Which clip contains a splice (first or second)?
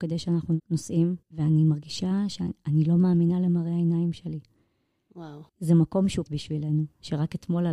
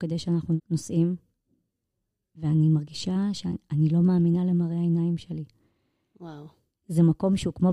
first